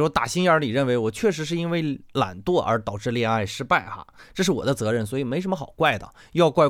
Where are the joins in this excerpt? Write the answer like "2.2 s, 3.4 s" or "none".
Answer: none